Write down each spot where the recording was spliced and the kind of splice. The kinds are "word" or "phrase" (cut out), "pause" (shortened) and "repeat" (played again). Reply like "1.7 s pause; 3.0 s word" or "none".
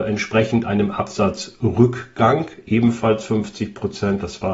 none